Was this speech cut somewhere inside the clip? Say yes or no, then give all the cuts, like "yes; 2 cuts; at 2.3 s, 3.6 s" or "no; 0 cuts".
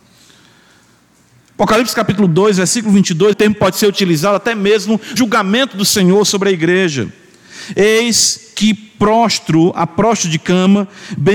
yes; 2 cuts; at 3.3 s, 5.2 s